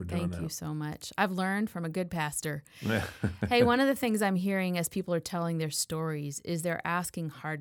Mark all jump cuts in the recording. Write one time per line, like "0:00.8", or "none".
none

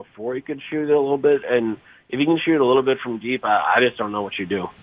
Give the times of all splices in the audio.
none

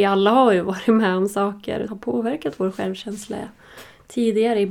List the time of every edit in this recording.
0:01.9

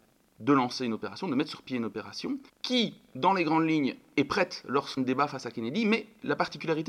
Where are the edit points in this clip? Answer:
0:02.5
0:05.0

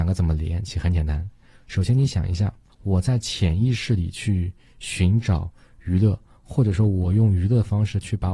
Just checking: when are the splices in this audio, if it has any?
none

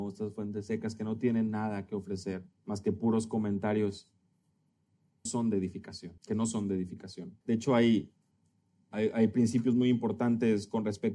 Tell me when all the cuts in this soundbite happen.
0:02.5
0:05.3
0:06.2
0:07.4

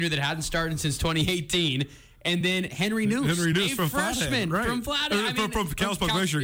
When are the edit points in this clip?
none

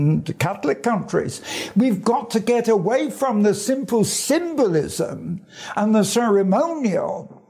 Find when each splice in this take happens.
none

